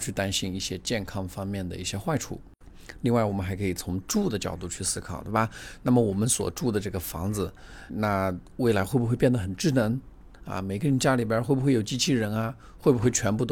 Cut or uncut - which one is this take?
cut